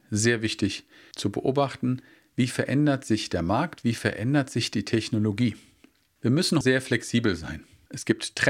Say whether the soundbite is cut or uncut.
cut